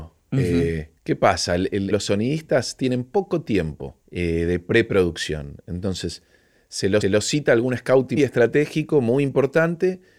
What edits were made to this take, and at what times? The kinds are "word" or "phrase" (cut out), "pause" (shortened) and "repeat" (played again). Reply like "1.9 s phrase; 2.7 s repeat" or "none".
1.0 s pause; 1.9 s phrase; 4.0 s pause; 7.0 s repeat; 8.2 s word